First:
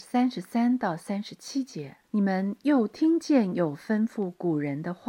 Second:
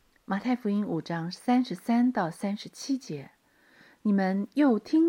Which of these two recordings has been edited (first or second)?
first